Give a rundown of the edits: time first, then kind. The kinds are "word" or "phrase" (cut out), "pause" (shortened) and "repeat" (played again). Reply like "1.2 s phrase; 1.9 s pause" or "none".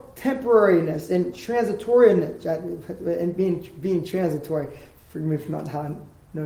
none